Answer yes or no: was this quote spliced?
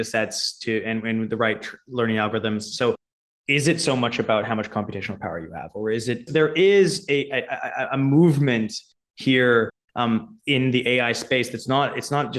no